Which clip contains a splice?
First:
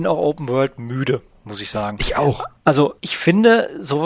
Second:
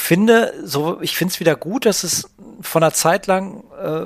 first; 1 cut; at 3.0 s

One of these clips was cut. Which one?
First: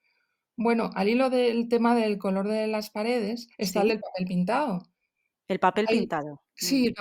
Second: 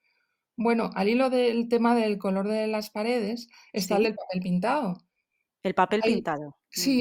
first; 1 cut; at 3.5 s

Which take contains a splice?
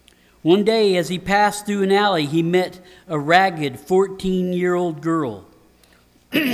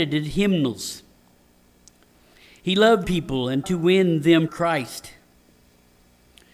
second; 3 cuts; at 3.0 s, 3.6 s, 4.5 s

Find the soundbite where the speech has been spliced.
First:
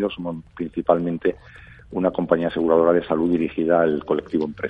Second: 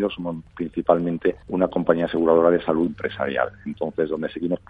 second; 2 cuts; at 1.4 s, 2.9 s

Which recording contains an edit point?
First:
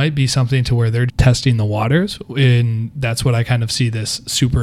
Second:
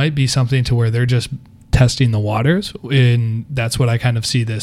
first; 1 cut; at 1.1 s

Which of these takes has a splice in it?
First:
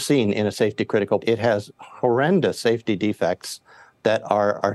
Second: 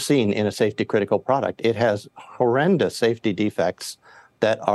first; 1 cut; at 1.2 s

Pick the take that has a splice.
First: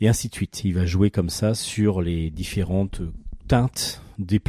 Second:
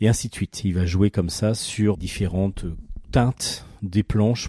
second; 1 cut; at 1.9 s

